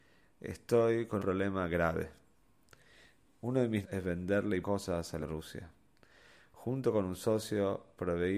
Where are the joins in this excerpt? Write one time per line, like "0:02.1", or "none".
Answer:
0:01.2
0:03.8
0:04.6
0:05.2

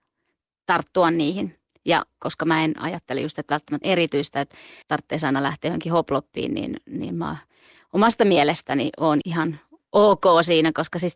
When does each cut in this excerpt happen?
0:03.8
0:04.8
0:09.2

